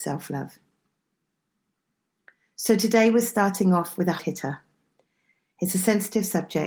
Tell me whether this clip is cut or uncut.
cut